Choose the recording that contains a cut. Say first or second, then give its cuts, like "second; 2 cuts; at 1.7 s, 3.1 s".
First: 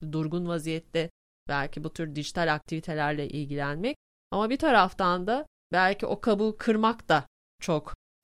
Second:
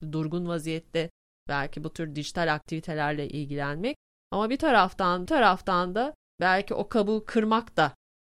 second; 1 cut; at 5.3 s